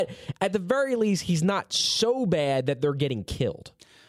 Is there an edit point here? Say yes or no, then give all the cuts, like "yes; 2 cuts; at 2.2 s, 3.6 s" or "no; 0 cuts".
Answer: no; 0 cuts